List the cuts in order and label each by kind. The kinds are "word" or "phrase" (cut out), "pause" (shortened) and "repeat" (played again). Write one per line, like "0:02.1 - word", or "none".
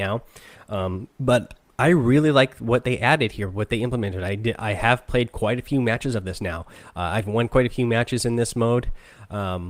0:01.1 - pause